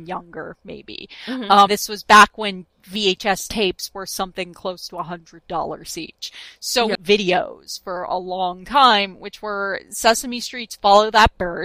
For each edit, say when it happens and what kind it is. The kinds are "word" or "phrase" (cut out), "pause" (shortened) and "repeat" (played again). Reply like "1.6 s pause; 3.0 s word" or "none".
1.7 s word; 6.9 s phrase